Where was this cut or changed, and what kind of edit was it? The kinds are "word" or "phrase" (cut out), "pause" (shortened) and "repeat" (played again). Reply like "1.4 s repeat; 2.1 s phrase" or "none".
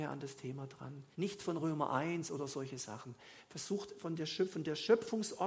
1.1 s pause